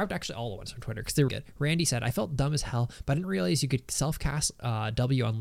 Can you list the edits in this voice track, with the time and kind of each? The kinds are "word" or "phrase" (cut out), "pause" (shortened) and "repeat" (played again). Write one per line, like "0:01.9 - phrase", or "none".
0:01.3 - word